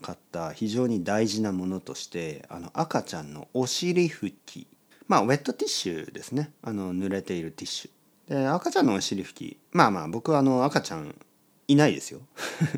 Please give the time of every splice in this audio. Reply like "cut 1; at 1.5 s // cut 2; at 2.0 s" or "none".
cut 1; at 4.9 s // cut 2; at 6.6 s // cut 3; at 8.1 s